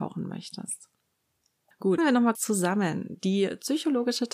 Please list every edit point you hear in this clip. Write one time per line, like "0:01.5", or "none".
0:02.0
0:02.3